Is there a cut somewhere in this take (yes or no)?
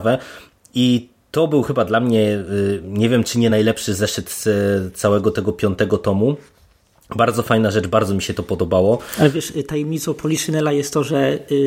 no